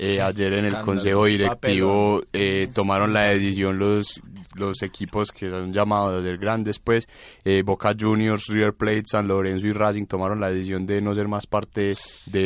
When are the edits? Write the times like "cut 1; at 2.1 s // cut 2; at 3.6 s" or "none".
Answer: none